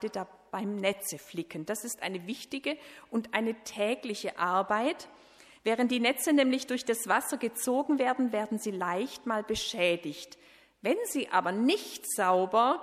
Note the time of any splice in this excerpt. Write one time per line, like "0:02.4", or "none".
none

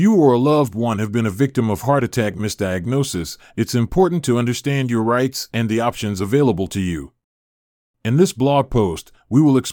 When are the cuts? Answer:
none

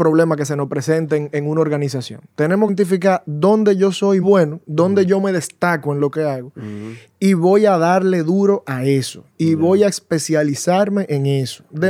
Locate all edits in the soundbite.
0:02.7
0:04.2

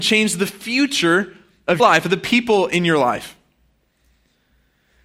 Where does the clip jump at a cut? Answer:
0:01.8

